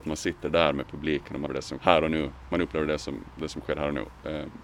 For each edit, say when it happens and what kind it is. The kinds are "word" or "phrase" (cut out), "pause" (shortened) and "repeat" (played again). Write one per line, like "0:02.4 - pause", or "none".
0:01.5 - word
0:01.8 - word